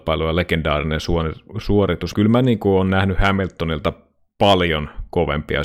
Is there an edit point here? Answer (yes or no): yes